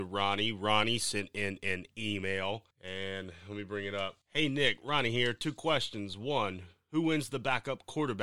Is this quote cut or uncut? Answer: cut